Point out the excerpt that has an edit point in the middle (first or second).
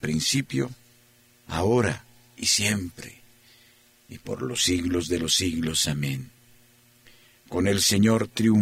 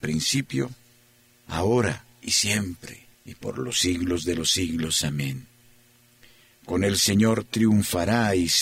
second